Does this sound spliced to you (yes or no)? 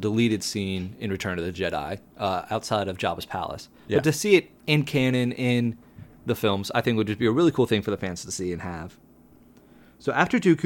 no